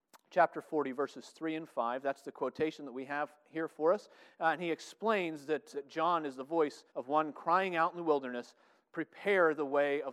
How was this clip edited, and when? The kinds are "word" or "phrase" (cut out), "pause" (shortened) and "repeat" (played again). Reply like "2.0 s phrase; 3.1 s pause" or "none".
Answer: 5.7 s word; 6.9 s pause